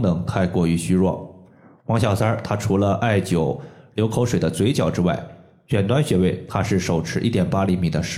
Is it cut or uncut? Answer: uncut